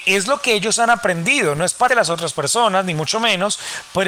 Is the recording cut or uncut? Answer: cut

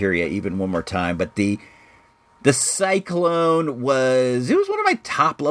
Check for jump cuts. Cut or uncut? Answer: uncut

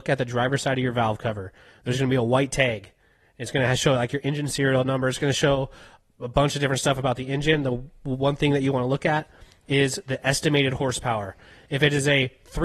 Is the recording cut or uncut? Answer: uncut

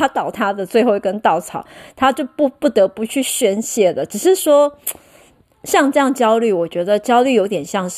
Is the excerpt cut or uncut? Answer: uncut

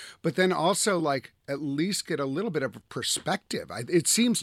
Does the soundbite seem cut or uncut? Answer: uncut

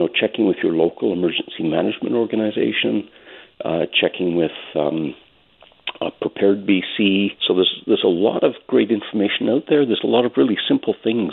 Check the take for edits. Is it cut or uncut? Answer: cut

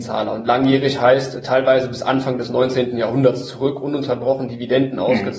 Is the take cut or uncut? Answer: uncut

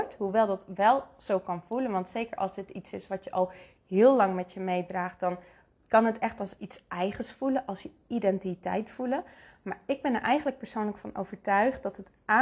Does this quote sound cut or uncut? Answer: uncut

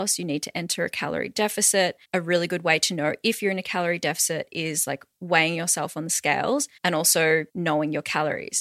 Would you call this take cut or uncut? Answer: cut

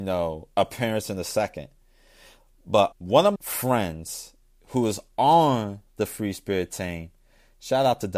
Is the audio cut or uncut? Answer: cut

